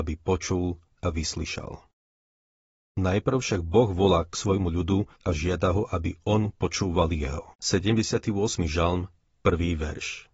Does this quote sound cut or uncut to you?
cut